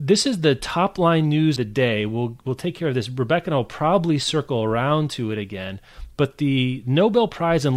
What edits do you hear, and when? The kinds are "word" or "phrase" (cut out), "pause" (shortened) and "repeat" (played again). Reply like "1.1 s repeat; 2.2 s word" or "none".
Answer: 1.6 s word